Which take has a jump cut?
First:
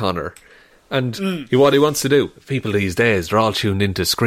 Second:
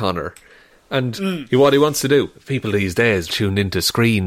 second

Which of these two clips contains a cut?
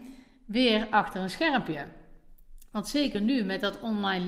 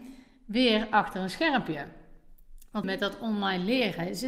second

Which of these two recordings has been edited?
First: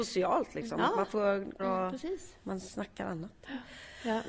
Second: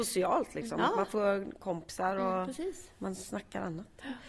first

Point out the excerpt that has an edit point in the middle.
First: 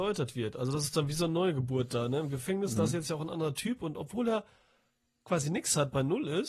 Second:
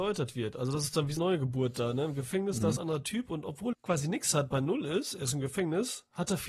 second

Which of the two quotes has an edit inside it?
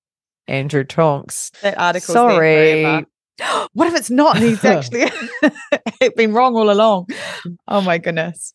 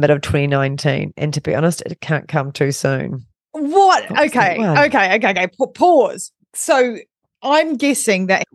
first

